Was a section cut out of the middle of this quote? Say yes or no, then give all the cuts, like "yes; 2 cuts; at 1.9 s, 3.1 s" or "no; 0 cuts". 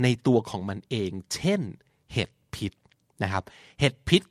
no; 0 cuts